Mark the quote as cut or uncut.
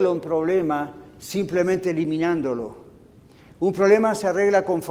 uncut